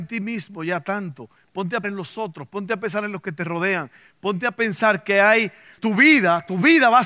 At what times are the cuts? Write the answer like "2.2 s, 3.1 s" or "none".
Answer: 1.8 s, 5.8 s